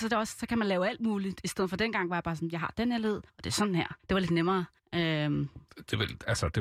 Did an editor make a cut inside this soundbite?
yes; 3 cuts; at 3.3 s, 4.0 s, 4.8 s

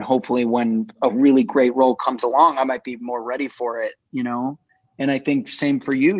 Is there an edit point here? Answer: no; 0 cuts

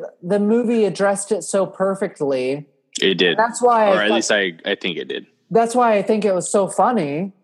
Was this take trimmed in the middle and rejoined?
no; 0 cuts

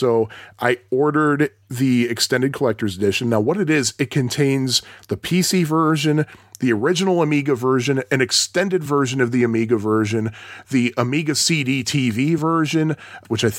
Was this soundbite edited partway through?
no; 0 cuts

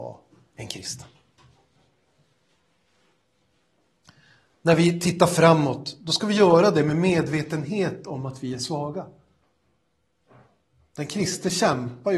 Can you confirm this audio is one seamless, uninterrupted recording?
yes; 0 cuts

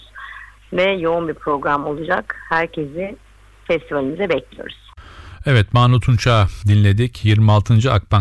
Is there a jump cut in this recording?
no; 0 cuts

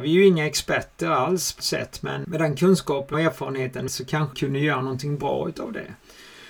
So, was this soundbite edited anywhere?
yes; 5 cuts; at 1.6 s, 2.2 s, 3.1 s, 3.9 s, 4.3 s

